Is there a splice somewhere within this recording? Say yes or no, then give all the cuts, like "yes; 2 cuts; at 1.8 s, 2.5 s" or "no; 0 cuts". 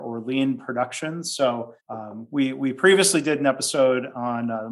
yes; 1 cut; at 1.8 s